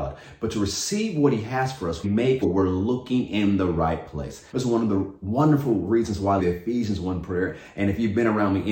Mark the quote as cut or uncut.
cut